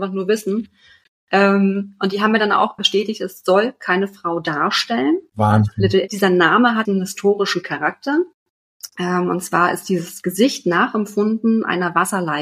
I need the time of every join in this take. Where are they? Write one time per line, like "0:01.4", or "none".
0:02.8
0:06.1
0:06.8

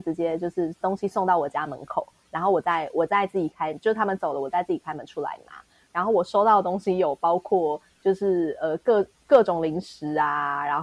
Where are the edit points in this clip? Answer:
none

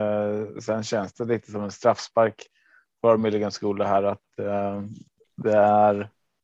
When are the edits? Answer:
none

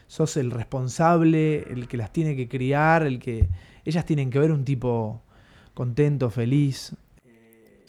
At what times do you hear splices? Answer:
none

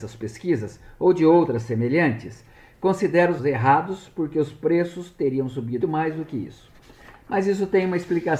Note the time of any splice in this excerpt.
0:03.4
0:05.8

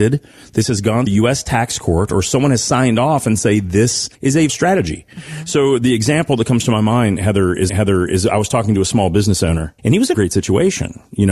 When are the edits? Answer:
0:01.1
0:04.1
0:04.5
0:07.7
0:09.8
0:10.1

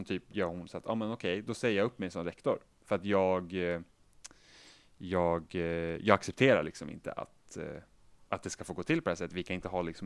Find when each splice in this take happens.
0:08.0

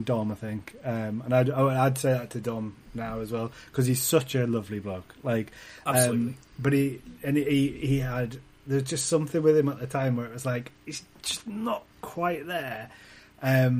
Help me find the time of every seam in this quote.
0:11.9

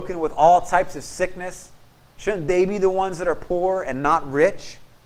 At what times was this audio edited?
none

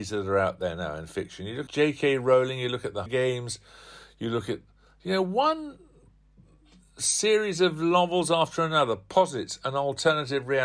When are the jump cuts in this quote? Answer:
0:01.7
0:03.1

